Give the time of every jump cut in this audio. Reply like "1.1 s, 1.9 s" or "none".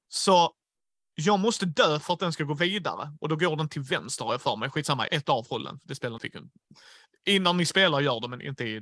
5.1 s, 6.2 s